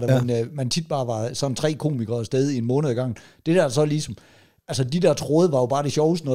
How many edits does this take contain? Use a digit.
0